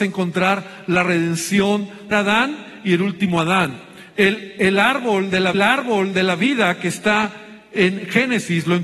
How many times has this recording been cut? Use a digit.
2